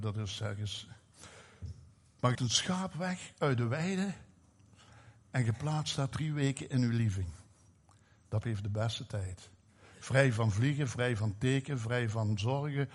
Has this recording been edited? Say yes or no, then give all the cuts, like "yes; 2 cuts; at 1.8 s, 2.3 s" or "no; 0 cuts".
yes; 3 cuts; at 2.3 s, 6.1 s, 8.4 s